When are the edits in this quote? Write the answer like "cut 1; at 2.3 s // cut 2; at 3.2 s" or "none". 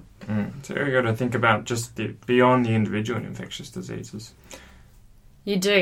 none

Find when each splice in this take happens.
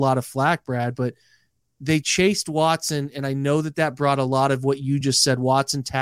none

